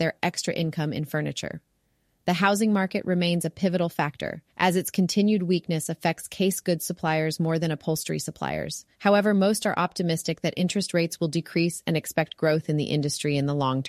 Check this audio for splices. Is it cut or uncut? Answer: cut